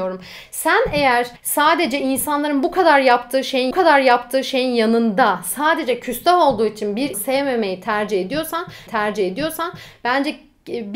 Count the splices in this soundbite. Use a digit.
4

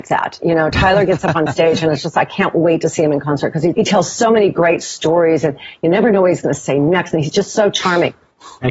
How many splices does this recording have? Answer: 1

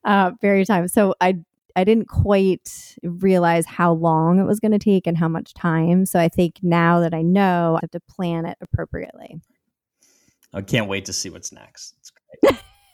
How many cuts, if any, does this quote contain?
1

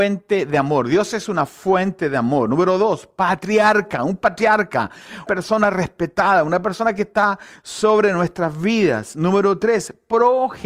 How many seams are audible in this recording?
1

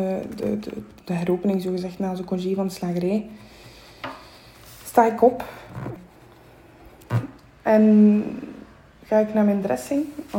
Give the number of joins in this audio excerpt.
0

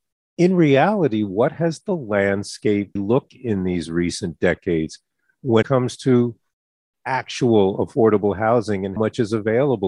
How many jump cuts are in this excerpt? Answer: 4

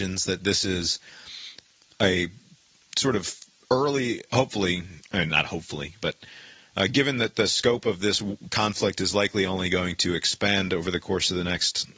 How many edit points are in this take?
0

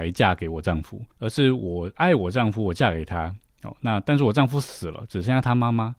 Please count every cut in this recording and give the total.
1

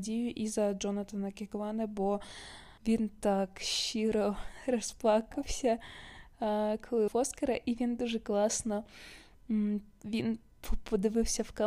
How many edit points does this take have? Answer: 2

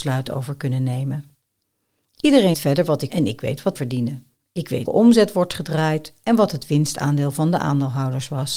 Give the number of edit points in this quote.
4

